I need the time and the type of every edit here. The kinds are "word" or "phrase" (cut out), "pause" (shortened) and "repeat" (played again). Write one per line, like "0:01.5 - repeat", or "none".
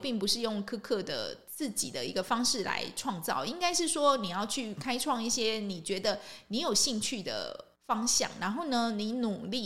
0:07.8 - pause